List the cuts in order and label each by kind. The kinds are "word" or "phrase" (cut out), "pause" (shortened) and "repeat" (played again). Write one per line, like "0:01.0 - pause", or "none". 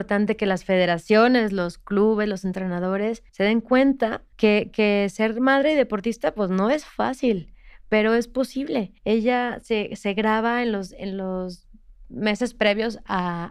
0:03.3 - pause
0:04.3 - pause
0:09.0 - pause